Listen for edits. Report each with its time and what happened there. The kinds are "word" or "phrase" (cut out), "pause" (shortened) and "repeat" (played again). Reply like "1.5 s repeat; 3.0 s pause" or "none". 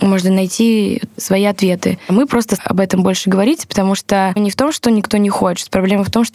2.6 s word; 4.4 s word